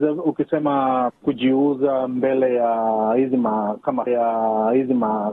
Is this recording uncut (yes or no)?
no